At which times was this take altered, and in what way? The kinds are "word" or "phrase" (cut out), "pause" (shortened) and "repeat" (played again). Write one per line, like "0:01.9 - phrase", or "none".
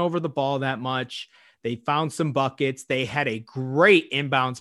none